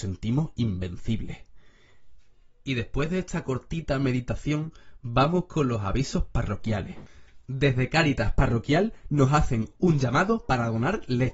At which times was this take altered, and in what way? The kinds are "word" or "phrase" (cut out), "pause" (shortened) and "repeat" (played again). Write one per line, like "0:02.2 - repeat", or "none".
0:07.4 - pause

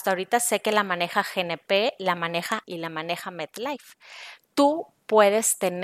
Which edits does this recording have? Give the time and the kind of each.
0:02.6 - word

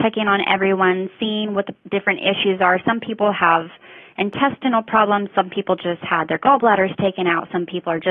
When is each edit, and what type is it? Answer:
none

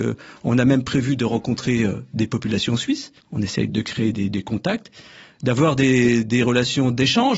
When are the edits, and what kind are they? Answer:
0:03.2 - pause
0:03.7 - word

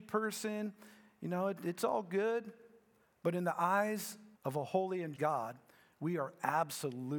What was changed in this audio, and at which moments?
0:04.3 - pause
0:05.1 - word

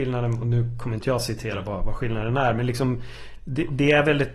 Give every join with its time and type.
none

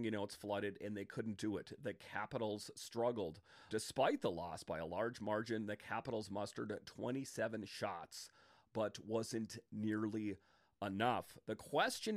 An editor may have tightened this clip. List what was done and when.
0:03.7 - word

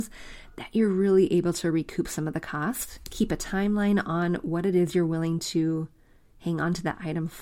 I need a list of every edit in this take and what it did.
none

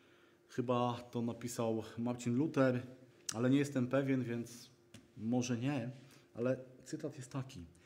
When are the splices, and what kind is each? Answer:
0:03.1 - pause

